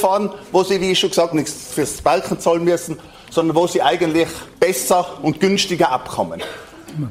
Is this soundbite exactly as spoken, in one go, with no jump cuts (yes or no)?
no